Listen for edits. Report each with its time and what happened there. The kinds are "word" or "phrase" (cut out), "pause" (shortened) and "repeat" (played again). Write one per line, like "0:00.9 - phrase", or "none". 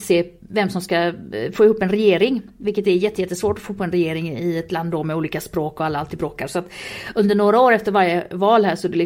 none